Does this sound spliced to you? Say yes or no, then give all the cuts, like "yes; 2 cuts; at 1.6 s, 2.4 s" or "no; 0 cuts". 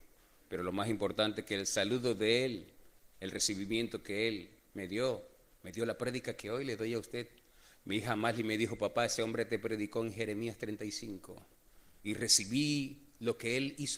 no; 0 cuts